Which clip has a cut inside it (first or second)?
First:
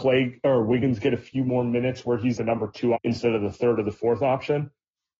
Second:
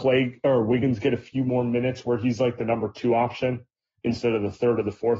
first